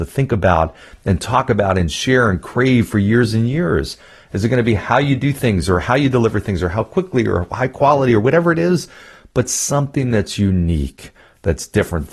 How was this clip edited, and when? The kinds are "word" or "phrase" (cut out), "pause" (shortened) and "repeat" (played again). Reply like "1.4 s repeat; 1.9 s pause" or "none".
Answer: none